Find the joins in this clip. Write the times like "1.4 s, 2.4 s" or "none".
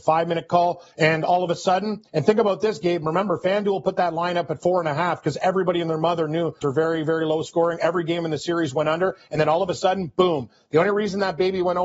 0.9 s, 2.1 s, 6.6 s